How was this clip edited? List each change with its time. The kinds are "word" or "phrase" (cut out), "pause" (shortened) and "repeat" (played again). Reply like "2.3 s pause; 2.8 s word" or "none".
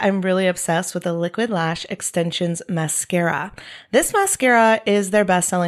none